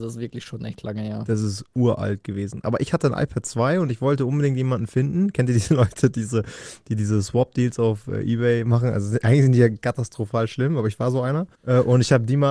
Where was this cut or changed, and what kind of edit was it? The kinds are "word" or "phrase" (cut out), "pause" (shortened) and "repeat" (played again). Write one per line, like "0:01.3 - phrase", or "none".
0:11.5 - pause